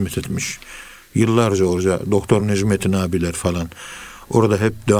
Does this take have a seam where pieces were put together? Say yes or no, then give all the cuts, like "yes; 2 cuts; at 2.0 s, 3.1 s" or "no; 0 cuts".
no; 0 cuts